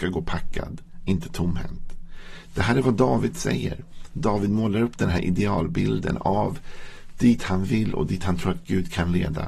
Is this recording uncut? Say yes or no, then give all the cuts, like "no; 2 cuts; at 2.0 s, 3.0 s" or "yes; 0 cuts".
yes; 0 cuts